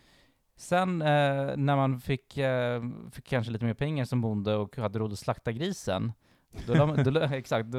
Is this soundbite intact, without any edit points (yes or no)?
yes